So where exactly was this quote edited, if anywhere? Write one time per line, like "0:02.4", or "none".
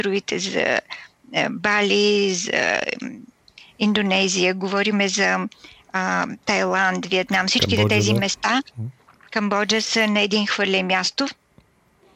none